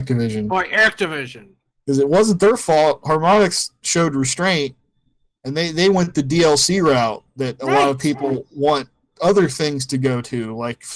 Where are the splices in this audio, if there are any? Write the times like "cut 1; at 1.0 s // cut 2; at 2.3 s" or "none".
none